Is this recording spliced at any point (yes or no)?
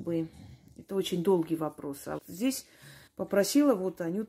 yes